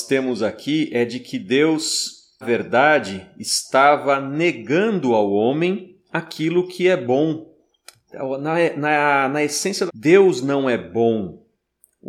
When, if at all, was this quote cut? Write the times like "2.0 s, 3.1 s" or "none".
2.4 s, 9.9 s